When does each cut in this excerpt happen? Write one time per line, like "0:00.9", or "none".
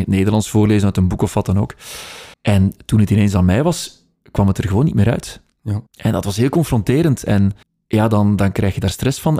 0:02.3
0:05.9
0:07.6